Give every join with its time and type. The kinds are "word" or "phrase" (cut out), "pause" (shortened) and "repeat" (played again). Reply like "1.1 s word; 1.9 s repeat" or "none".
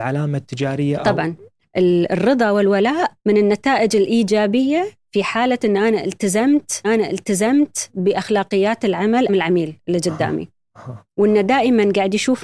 3.2 s pause; 6.8 s repeat; 9.3 s word